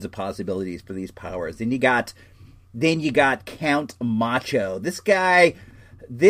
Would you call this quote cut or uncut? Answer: uncut